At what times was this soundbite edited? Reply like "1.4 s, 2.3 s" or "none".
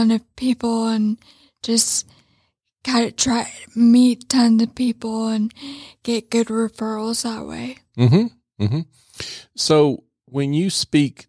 none